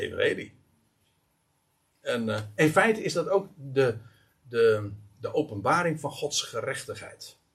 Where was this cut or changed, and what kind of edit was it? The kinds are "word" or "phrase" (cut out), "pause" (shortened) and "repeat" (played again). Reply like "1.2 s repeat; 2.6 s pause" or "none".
none